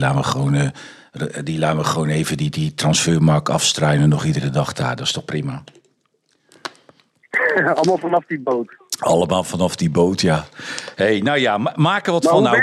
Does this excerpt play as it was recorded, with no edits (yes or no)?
yes